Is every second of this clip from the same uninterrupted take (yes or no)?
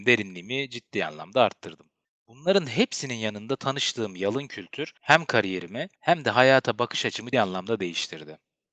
no